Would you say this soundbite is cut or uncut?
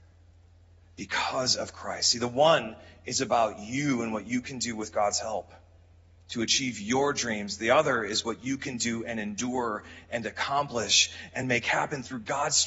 uncut